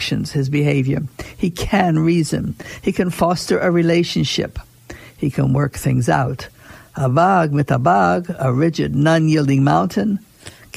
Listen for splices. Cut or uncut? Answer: uncut